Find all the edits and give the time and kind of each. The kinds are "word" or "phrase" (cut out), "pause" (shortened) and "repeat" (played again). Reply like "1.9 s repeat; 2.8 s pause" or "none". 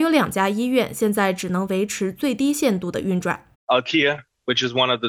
3.5 s pause